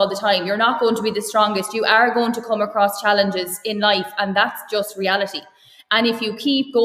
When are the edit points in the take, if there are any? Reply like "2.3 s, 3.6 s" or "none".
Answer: none